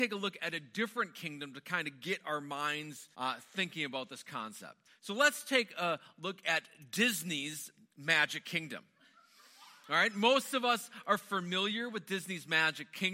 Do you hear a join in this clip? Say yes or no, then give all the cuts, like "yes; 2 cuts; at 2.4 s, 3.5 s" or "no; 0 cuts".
yes; 2 cuts; at 3.1 s, 4.9 s